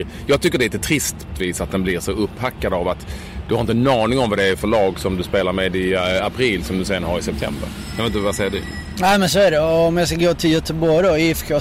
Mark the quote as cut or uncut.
cut